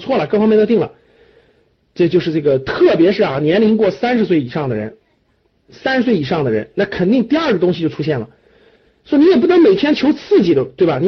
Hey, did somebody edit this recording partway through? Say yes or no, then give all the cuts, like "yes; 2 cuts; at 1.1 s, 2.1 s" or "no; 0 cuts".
no; 0 cuts